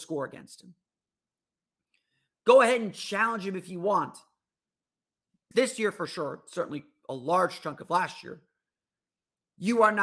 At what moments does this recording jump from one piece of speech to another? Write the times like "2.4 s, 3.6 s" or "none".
5.5 s